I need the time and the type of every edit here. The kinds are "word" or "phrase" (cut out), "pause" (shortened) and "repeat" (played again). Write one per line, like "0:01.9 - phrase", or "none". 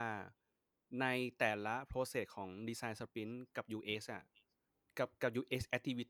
0:04.7 - pause